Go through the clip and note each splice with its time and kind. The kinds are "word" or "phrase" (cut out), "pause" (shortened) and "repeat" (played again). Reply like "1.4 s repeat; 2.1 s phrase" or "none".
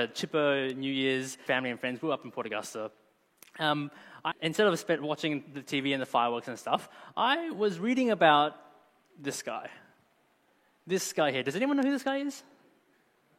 1.5 s word; 4.3 s word